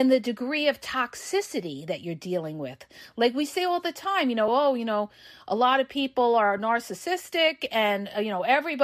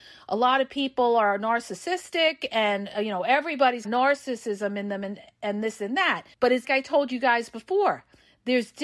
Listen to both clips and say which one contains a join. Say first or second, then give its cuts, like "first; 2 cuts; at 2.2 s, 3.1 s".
second; 3 cuts; at 3.8 s, 6.3 s, 6.6 s